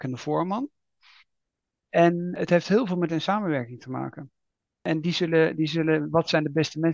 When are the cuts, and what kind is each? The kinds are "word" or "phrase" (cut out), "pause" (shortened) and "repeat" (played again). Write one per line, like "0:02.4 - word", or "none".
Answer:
0:03.1 - word